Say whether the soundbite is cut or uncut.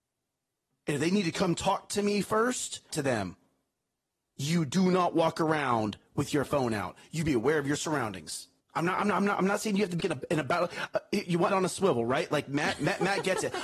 cut